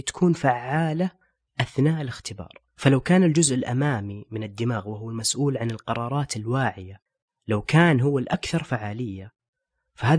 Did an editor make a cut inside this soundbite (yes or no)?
yes